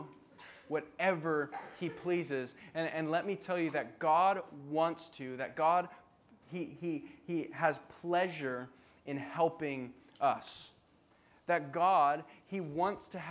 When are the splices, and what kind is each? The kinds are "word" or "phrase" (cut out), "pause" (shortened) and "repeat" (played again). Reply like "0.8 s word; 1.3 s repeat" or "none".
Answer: none